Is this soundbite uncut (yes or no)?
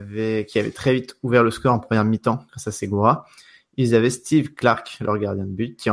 yes